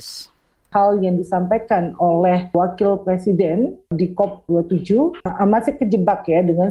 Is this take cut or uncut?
uncut